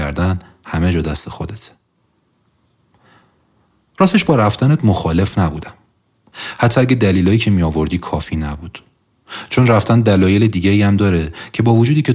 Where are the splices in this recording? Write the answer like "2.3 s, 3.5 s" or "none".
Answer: none